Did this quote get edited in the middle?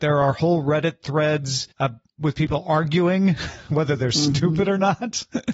yes; 1 cut; at 1.7 s

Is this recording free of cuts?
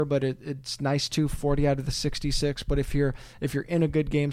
yes; 0 cuts

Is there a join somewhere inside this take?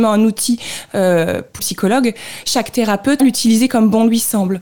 yes; 2 cuts; at 1.6 s, 3.2 s

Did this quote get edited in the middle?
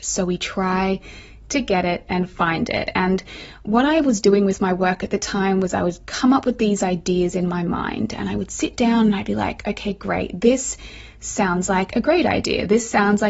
no; 0 cuts

